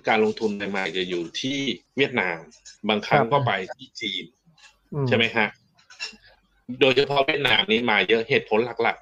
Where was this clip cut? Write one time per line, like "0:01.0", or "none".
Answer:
0:01.9
0:02.8